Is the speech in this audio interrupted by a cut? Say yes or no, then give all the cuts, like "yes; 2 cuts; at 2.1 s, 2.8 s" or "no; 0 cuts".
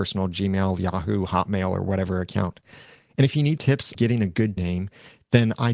yes; 3 cuts; at 3.6 s, 3.9 s, 4.6 s